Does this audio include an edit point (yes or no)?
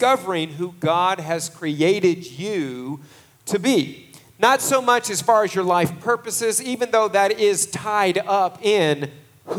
no